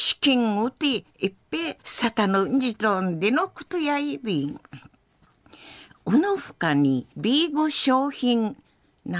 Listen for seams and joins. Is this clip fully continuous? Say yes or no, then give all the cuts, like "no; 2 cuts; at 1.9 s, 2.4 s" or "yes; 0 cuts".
no; 2 cuts; at 1.8 s, 7.1 s